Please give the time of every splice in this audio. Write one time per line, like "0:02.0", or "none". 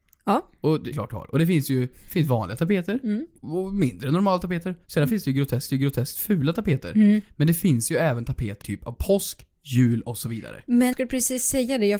0:00.9
0:03.4
0:04.8
0:05.7
0:08.6
0:10.9